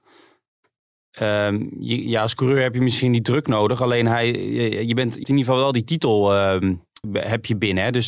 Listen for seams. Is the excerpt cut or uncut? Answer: cut